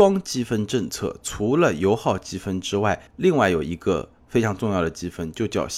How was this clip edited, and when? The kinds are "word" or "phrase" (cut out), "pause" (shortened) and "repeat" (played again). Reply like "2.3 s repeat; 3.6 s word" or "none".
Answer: 3.1 s pause